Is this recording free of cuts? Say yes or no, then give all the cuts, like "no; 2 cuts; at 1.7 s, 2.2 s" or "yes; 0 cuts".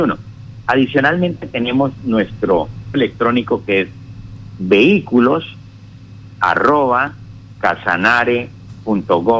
no; 1 cut; at 2.9 s